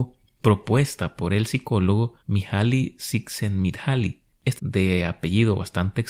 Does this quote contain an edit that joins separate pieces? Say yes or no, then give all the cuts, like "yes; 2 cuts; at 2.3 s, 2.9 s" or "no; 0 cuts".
yes; 2 cuts; at 2.2 s, 4.6 s